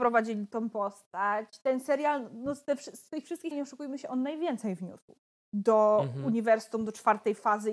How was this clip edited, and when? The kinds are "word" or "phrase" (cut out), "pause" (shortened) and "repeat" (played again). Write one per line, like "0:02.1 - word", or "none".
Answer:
0:03.5 - word
0:05.4 - pause